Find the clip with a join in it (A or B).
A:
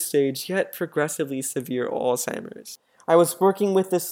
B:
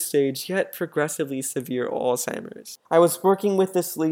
B